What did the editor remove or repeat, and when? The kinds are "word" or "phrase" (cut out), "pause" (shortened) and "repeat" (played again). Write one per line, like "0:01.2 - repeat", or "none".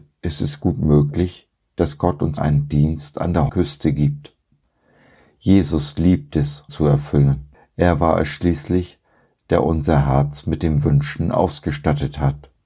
0:02.4 - word
0:03.5 - word
0:06.7 - phrase
0:07.5 - pause